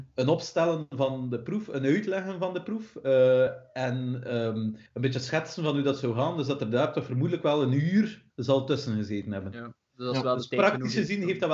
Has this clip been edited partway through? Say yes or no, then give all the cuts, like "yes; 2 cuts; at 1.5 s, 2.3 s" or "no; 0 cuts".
yes; 2 cuts; at 4.9 s, 8.3 s